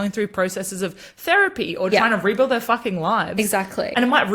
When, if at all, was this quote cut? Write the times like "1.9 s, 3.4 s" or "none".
none